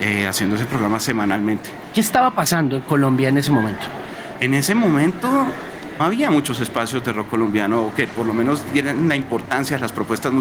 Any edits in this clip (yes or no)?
yes